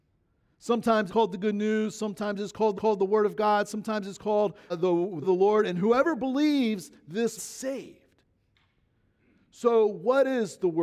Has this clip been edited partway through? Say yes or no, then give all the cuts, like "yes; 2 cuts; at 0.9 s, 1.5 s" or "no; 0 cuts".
yes; 5 cuts; at 1.1 s, 2.7 s, 4.7 s, 5.2 s, 7.4 s